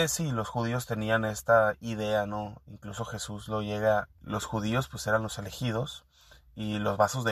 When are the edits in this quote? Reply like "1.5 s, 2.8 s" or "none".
4.2 s